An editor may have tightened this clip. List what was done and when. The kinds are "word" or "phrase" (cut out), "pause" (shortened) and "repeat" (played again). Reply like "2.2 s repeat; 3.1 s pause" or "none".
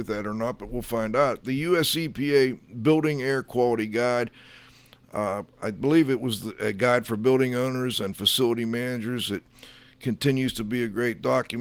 none